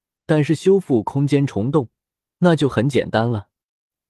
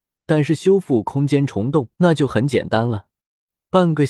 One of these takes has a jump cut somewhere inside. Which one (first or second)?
second